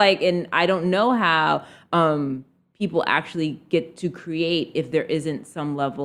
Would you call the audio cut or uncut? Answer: uncut